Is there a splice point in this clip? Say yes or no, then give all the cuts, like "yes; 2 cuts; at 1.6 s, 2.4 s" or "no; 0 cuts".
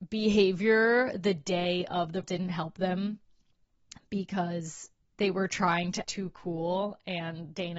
yes; 3 cuts; at 2.2 s, 5.0 s, 6.0 s